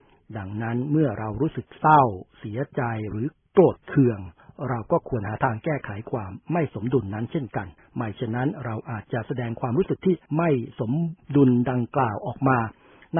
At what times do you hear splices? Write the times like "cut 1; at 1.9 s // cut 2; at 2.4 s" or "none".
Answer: cut 1; at 7.8 s // cut 2; at 10.3 s